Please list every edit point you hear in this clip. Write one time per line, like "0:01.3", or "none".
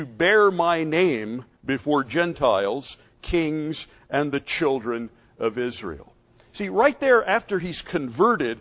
none